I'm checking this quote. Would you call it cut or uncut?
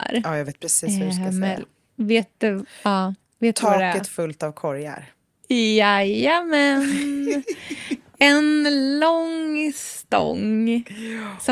uncut